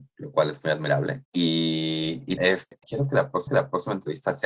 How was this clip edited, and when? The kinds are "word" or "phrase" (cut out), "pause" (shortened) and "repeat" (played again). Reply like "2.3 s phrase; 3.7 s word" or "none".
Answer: 1.2 s pause; 2.4 s word; 2.8 s word; 3.5 s repeat